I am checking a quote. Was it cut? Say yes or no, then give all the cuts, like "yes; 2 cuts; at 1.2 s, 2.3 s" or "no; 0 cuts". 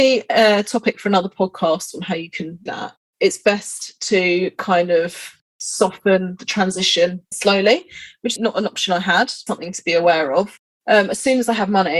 yes; 4 cuts; at 2.7 s, 7.3 s, 8.4 s, 9.5 s